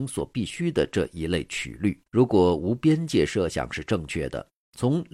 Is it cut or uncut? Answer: cut